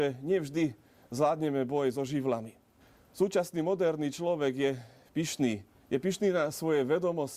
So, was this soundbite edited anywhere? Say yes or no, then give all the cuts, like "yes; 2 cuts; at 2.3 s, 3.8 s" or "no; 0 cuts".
yes; 1 cut; at 2.8 s